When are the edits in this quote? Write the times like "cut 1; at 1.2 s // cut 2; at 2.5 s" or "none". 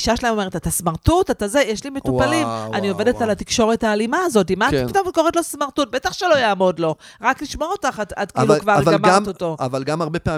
none